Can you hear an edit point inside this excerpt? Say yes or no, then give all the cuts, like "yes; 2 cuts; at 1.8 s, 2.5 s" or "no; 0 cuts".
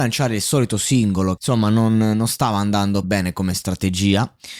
yes; 2 cuts; at 1.4 s, 3.0 s